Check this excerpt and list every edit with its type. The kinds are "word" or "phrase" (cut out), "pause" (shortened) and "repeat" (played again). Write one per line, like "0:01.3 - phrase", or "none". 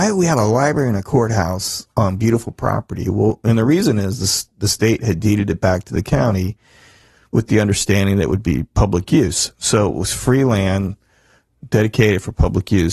none